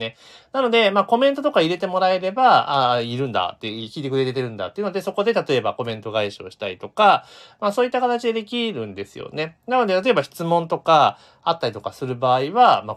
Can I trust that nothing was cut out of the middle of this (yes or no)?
yes